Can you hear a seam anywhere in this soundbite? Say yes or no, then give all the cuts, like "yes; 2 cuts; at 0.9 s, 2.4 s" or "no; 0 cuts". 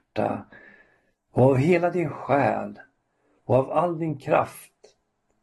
no; 0 cuts